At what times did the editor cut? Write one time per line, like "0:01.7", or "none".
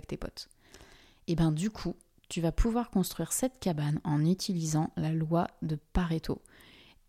none